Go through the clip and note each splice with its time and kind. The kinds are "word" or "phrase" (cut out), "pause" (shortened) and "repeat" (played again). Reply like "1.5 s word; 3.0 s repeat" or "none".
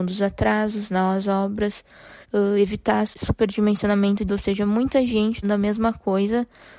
2.2 s pause; 3.1 s word; 4.3 s word; 5.4 s phrase